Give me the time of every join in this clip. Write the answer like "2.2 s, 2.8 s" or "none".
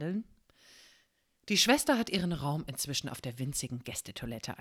none